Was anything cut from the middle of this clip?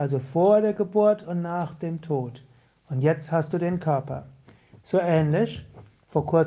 no; 0 cuts

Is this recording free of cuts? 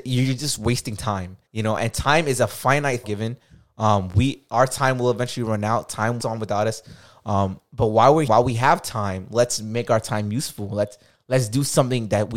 no; 4 cuts; at 1.5 s, 3.0 s, 6.2 s, 8.3 s

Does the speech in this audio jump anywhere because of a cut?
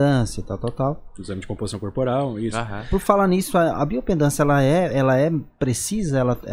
no; 0 cuts

